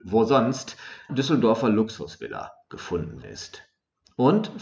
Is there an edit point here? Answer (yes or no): yes